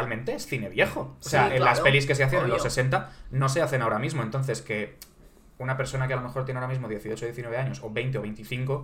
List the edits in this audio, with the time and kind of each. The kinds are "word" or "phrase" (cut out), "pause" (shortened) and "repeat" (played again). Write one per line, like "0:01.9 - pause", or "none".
none